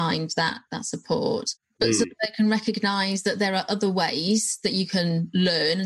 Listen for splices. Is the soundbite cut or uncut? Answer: uncut